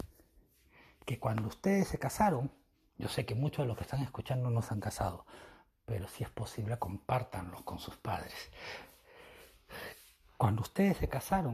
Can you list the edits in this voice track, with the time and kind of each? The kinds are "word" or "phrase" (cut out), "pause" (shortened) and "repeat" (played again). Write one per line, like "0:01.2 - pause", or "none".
0:02.7 - pause